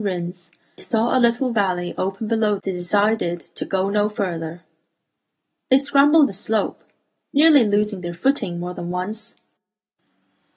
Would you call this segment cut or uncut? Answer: cut